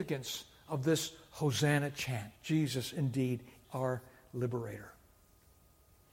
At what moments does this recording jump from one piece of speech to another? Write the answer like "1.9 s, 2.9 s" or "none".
2.3 s, 3.6 s